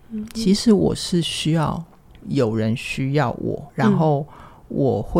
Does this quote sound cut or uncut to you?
cut